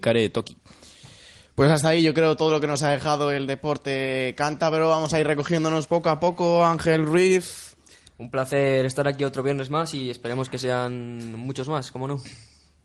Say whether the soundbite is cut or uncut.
uncut